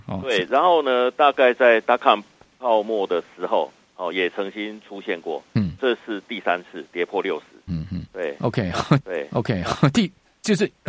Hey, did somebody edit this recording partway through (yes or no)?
yes